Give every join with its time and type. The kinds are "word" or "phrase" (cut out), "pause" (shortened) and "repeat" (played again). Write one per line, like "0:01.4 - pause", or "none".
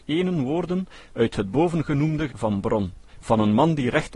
0:01.1 - word
0:02.3 - word
0:03.1 - pause